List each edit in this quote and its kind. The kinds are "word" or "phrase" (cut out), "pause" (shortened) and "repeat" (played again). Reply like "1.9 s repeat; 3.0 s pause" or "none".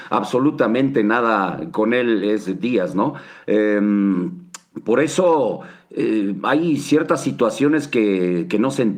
none